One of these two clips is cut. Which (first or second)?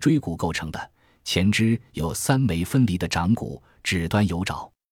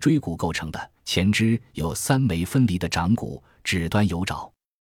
second